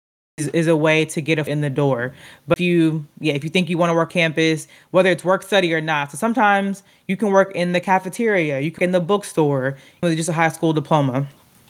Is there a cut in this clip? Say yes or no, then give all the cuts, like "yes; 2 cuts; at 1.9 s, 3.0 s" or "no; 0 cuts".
yes; 5 cuts; at 1.5 s, 2.6 s, 4.1 s, 8.8 s, 10.0 s